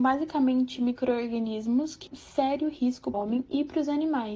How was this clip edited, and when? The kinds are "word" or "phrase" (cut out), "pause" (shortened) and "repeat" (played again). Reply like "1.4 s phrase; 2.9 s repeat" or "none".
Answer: 2.1 s word; 3.1 s phrase